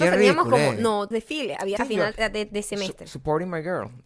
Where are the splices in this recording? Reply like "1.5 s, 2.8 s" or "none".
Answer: 1.1 s, 1.8 s, 2.1 s